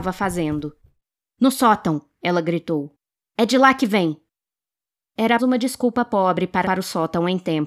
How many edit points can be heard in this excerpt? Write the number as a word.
two